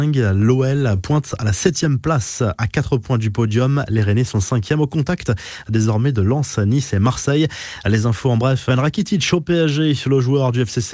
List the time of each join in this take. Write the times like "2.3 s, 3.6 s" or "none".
8.7 s

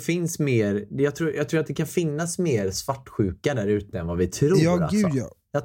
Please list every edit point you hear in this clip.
none

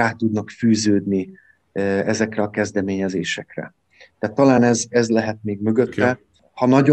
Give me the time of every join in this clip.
none

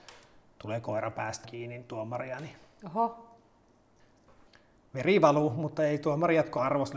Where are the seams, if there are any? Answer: 1.4 s

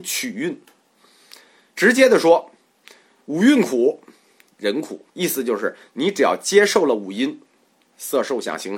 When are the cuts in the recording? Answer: 5.1 s

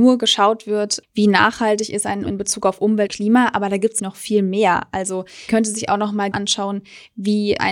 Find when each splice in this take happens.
1.0 s, 2.3 s, 3.1 s, 4.0 s, 5.5 s, 6.3 s

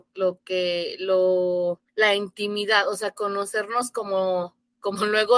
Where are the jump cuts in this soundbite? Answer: 1.9 s

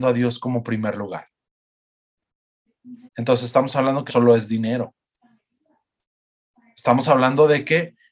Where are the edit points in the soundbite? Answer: 3.1 s, 4.1 s

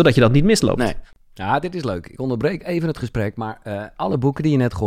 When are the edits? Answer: none

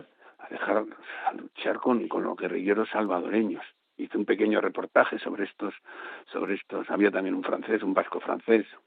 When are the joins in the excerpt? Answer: none

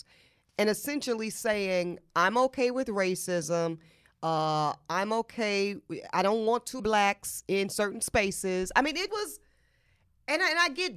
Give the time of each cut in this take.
6.8 s, 9.1 s

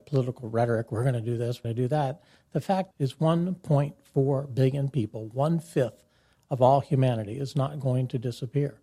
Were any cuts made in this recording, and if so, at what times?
1.6 s, 2.9 s

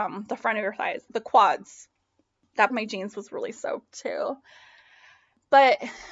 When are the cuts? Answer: 1.1 s, 2.7 s

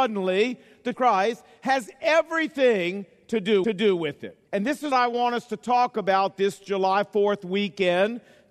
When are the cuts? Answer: 0.9 s, 3.6 s, 4.5 s, 4.9 s

